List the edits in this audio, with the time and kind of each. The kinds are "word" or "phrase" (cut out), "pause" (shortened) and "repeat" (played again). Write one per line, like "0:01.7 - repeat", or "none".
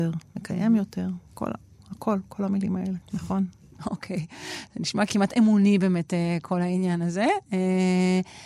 0:03.0 - pause
0:05.1 - word